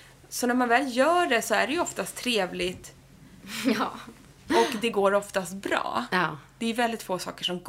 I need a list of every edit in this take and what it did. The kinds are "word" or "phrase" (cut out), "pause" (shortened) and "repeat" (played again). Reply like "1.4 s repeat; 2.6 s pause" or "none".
none